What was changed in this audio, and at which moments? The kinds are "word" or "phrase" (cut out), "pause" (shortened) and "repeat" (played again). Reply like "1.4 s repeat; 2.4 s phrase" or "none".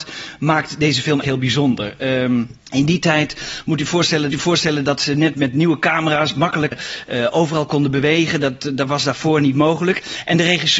1.2 s word; 2.6 s pause; 4.3 s repeat; 5.3 s word; 6.7 s word